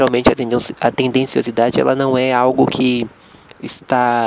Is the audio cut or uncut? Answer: uncut